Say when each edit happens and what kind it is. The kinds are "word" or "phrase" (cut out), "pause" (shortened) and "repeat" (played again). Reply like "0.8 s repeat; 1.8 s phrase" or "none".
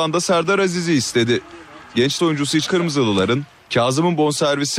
2.2 s word; 2.7 s word